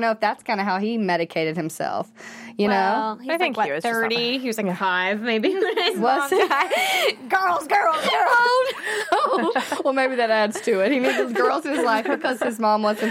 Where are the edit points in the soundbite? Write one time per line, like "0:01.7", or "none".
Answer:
none